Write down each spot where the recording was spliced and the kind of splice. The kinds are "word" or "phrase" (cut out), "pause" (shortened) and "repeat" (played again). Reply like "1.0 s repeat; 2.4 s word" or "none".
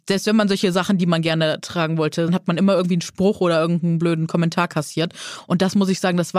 2.3 s phrase